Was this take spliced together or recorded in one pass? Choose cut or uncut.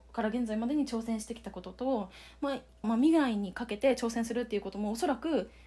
cut